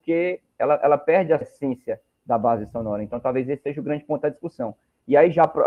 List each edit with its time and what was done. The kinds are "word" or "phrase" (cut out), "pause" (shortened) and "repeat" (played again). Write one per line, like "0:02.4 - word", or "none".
0:01.4 - word